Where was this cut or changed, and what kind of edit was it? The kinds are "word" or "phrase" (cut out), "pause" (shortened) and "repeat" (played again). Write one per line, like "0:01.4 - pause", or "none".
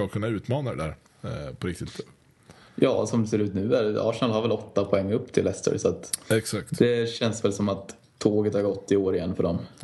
0:02.7 - pause